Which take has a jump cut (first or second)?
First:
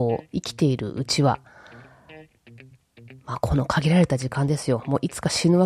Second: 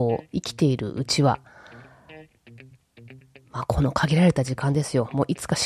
first